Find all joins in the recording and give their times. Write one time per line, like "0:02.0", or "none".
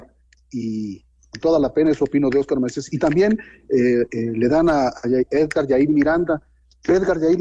0:01.2